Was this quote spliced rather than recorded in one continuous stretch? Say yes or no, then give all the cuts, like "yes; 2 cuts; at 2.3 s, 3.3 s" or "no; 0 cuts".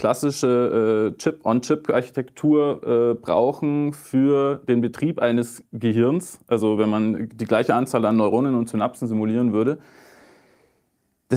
no; 0 cuts